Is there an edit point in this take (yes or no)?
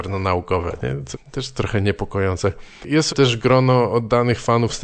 yes